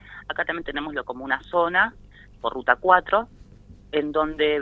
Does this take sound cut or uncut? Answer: cut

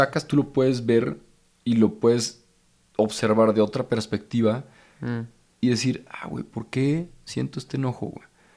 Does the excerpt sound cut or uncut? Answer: uncut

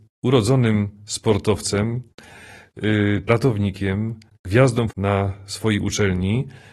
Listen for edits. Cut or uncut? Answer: cut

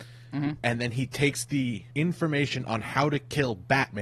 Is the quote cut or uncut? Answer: cut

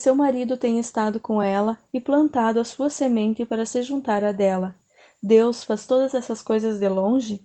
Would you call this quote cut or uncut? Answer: uncut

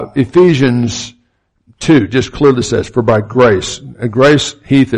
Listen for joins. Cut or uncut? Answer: uncut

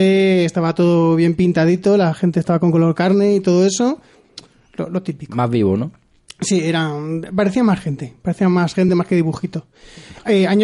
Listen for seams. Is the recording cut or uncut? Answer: uncut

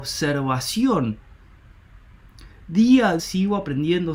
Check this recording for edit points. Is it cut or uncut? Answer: cut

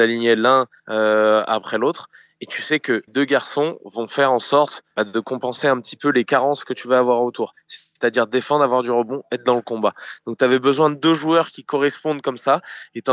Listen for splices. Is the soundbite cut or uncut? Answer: cut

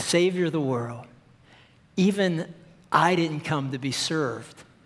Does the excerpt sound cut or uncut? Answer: uncut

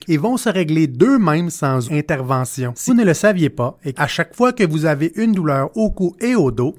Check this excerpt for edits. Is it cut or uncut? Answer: cut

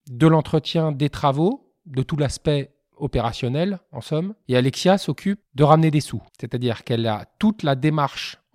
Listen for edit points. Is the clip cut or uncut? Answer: cut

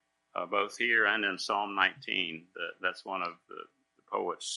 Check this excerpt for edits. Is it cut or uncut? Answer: uncut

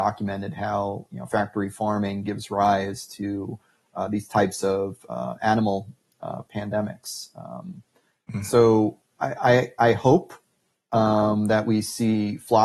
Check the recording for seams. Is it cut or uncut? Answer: uncut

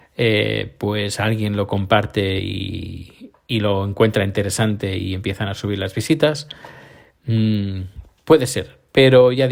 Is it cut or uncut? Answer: uncut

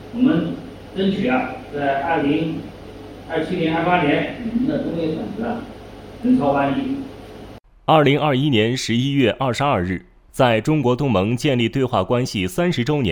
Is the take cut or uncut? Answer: uncut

